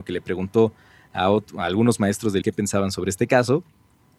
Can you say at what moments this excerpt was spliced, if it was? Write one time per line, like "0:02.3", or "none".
0:02.4